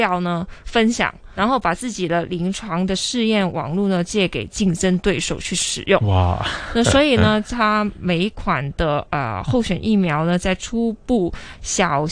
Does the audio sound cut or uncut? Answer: cut